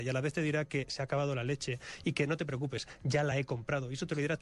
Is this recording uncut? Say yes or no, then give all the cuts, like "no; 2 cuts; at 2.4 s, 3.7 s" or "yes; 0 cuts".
yes; 0 cuts